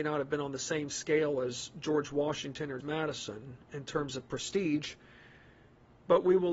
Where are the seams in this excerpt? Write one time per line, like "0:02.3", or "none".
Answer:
0:02.8